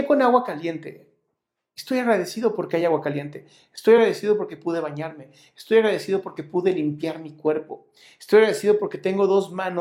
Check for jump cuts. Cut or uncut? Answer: uncut